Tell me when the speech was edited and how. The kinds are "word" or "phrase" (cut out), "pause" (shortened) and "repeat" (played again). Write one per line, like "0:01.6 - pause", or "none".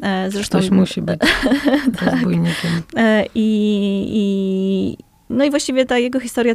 0:05.1 - pause